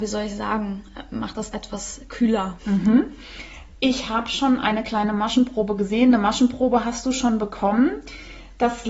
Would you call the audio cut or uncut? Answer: cut